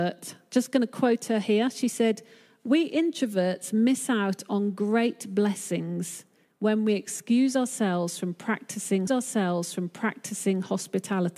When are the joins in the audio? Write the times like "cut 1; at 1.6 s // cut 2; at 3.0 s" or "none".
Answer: cut 1; at 9.1 s